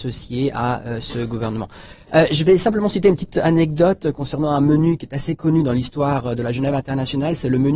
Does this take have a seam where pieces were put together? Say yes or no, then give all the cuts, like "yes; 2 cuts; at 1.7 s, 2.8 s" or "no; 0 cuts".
no; 0 cuts